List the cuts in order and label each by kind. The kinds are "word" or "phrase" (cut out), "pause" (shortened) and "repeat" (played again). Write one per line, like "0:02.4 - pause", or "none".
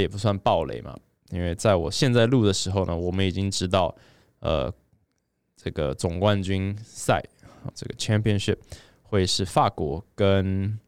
0:07.7 - word